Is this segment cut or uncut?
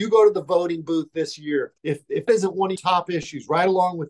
cut